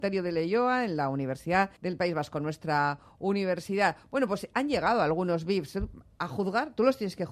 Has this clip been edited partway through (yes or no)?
yes